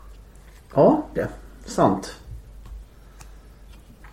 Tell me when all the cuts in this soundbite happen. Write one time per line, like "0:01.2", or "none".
0:01.2